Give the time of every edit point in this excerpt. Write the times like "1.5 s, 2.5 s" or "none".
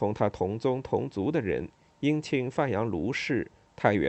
none